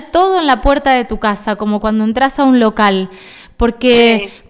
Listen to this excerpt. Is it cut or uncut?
uncut